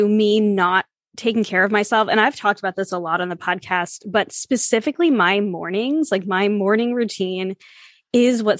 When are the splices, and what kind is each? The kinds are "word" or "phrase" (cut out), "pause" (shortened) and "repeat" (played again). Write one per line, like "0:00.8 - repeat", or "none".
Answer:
none